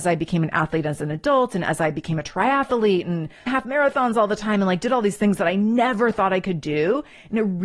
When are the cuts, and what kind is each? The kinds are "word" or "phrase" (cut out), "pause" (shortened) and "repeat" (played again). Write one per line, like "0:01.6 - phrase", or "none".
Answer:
0:03.5 - word